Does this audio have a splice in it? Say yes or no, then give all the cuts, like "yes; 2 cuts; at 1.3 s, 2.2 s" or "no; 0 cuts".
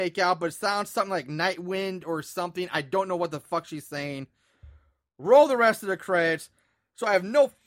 no; 0 cuts